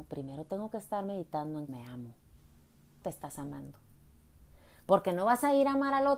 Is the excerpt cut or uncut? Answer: cut